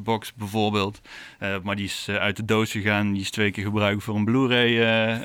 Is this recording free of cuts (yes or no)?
yes